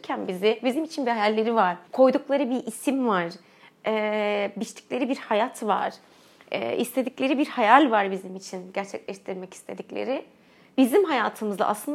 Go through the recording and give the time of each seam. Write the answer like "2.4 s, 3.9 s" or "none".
1.9 s